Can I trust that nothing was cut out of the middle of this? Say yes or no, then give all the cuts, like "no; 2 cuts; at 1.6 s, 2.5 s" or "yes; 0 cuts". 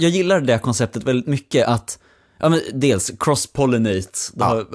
yes; 0 cuts